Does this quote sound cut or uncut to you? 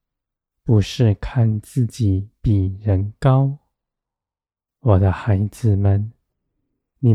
uncut